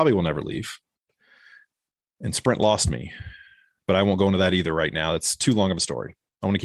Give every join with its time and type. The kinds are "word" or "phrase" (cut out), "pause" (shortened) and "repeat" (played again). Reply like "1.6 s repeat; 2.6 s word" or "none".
none